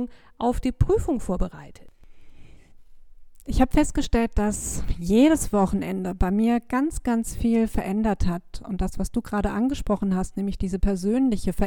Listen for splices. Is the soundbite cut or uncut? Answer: uncut